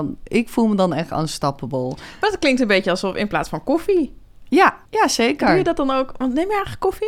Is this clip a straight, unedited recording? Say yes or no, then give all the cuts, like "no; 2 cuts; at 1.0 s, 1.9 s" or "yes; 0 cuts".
no; 1 cut; at 4.9 s